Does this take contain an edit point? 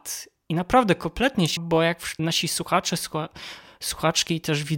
yes; 2 cuts; at 1.6 s, 2.2 s

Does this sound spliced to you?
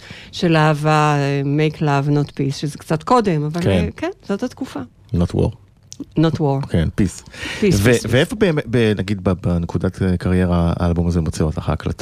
no; 0 cuts

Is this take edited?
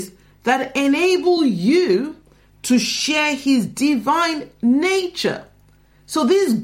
no; 0 cuts

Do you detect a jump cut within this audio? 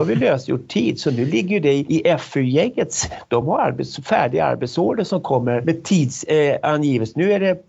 no; 0 cuts

